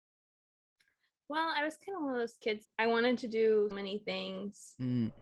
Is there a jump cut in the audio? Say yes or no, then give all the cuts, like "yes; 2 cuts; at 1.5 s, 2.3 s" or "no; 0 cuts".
yes; 2 cuts; at 2.6 s, 3.7 s